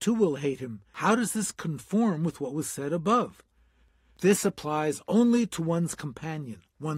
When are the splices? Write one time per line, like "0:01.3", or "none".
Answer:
none